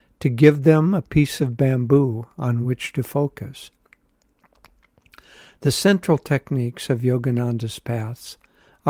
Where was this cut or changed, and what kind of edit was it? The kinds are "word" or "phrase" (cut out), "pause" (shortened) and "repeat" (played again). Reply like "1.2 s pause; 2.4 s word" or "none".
none